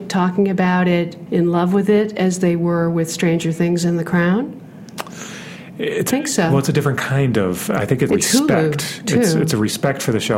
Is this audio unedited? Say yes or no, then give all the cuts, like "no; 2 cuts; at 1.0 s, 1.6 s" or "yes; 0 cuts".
no; 3 cuts; at 1.3 s, 6.1 s, 8.1 s